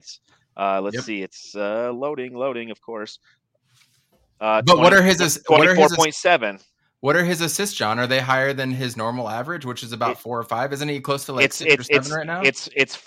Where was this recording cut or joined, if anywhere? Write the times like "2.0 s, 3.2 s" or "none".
none